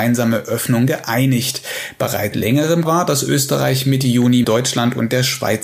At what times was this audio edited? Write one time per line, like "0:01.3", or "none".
0:02.3
0:02.8
0:04.4